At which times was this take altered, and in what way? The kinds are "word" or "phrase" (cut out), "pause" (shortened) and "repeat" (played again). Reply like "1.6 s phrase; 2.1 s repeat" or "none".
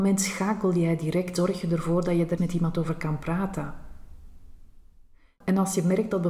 1.4 s word; 2.4 s word